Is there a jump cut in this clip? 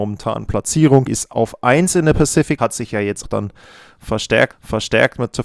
yes; 4 cuts; at 1.1 s, 2.6 s, 3.2 s, 4.5 s

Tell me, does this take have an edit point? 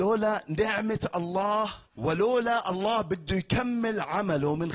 yes; 1 cut; at 1.9 s

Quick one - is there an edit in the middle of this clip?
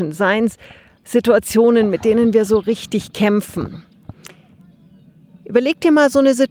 no; 0 cuts

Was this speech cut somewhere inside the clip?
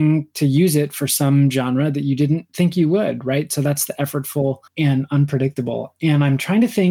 yes; 2 cuts; at 2.5 s, 4.7 s

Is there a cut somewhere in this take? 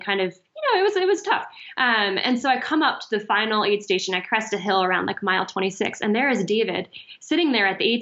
no; 0 cuts

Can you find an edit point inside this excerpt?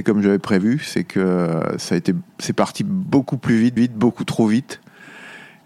yes; 1 cut; at 3.8 s

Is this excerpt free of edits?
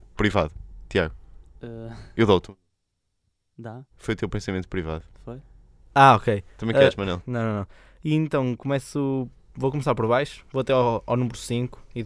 no; 1 cut; at 3.9 s

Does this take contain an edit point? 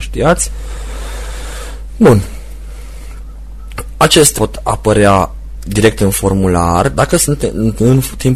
yes; 1 cut; at 4.3 s

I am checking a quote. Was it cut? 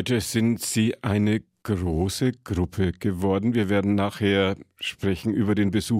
no; 0 cuts

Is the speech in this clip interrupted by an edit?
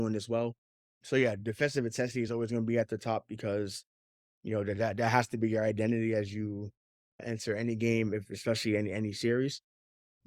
no; 0 cuts

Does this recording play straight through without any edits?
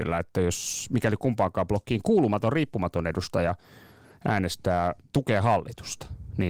yes; 0 cuts

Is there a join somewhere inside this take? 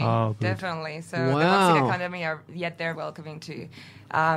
yes; 1 cut; at 2.9 s

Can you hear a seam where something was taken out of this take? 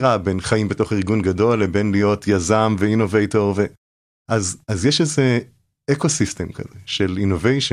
yes; 1 cut; at 4.6 s

